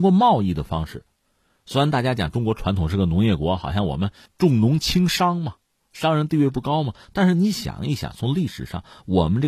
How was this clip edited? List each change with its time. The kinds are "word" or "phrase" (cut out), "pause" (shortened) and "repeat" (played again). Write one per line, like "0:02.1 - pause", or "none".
none